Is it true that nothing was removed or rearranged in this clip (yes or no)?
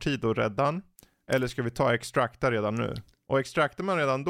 yes